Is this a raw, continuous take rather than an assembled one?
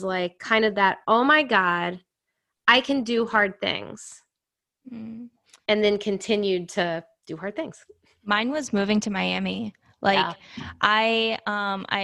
yes; 0 cuts

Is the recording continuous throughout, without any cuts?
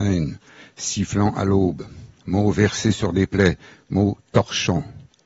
yes; 0 cuts

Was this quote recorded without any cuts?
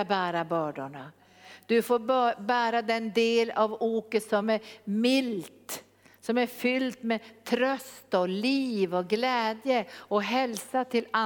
yes; 0 cuts

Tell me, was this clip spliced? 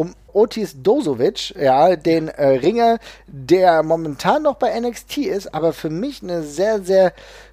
no; 0 cuts

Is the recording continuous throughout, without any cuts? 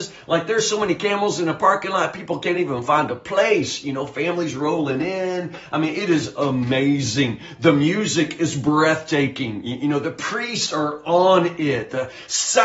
yes; 0 cuts

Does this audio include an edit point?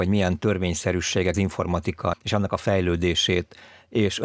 yes; 2 cuts; at 1.3 s, 2.1 s

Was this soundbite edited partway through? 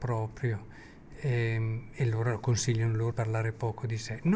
yes; 1 cut; at 3.1 s

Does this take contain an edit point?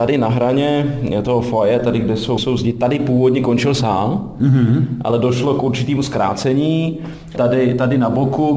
yes; 1 cut; at 2.4 s

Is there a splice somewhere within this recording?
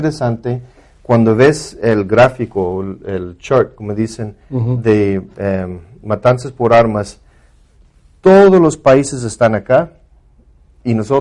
no; 0 cuts

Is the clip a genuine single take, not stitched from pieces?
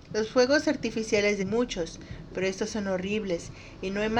no; 1 cut; at 1.4 s

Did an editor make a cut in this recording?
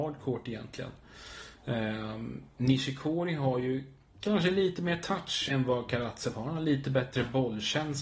yes; 1 cut; at 5.5 s

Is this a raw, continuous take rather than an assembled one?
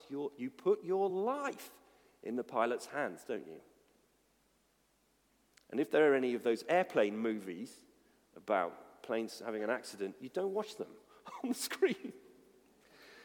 yes; 0 cuts

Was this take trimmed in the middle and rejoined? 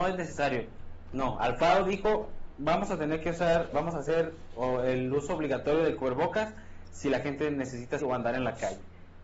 yes; 2 cuts; at 3.7 s, 8.0 s

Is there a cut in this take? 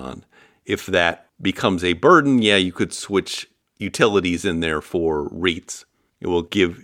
no; 0 cuts

